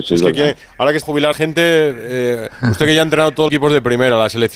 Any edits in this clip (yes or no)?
yes